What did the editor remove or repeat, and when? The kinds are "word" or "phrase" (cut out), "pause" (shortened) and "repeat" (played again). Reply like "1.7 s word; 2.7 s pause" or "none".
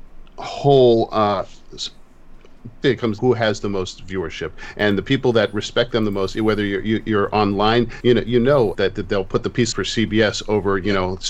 2.8 s word; 3.2 s phrase; 8.0 s word; 8.7 s word; 9.7 s phrase